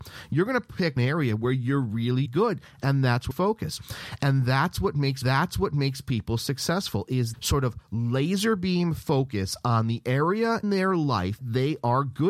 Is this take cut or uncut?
cut